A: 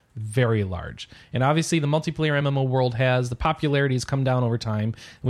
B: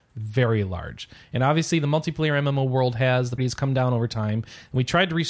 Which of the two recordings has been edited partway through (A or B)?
B